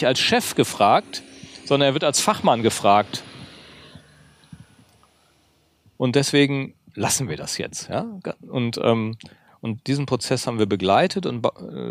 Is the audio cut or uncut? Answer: uncut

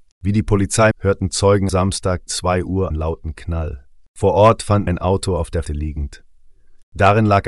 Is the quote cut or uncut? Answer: cut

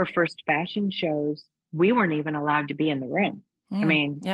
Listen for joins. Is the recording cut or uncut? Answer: cut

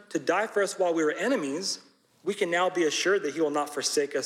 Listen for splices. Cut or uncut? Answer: cut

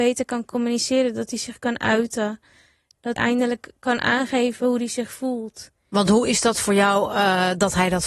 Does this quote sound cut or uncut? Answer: cut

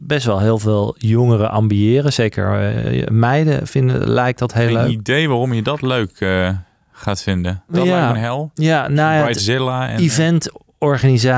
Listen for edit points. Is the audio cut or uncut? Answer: uncut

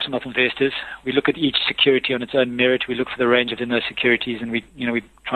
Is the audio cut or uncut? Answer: cut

